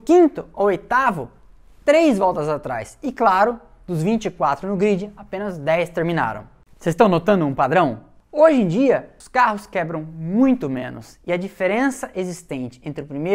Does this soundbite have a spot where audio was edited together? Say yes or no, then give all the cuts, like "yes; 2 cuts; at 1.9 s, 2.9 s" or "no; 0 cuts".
no; 0 cuts